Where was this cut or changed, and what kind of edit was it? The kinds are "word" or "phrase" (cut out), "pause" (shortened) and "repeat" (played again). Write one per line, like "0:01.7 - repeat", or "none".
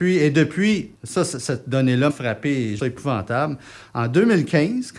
0:00.9 - pause
0:02.1 - word
0:02.8 - phrase